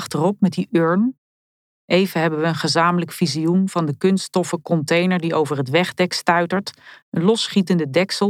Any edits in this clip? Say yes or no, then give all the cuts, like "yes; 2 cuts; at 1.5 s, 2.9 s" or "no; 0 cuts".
no; 0 cuts